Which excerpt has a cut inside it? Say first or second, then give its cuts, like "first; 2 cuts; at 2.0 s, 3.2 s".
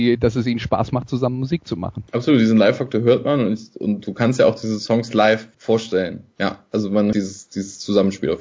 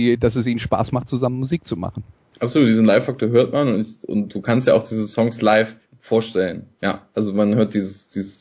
first; 3 cuts; at 2.1 s, 5.5 s, 7.1 s